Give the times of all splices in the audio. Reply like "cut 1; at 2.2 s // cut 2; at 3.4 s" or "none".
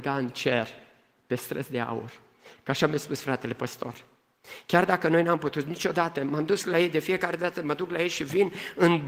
none